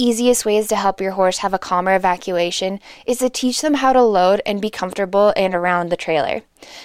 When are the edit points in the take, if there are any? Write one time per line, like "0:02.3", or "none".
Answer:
none

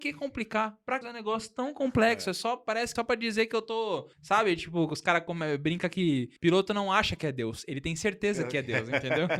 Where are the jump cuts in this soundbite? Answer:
0:01.0
0:03.0
0:04.1
0:06.4

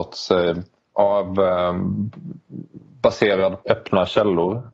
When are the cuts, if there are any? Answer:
0:00.9
0:03.6

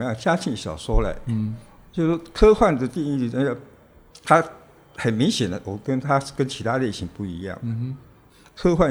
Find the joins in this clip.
none

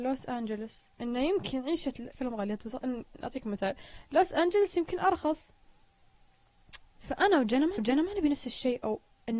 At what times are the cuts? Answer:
0:00.9
0:02.1
0:06.9
0:07.8

